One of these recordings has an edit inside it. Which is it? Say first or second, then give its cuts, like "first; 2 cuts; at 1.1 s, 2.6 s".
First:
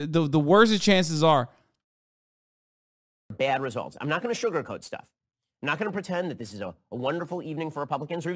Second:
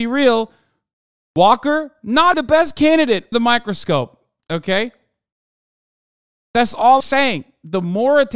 second; 3 cuts; at 2.3 s, 3.3 s, 7.0 s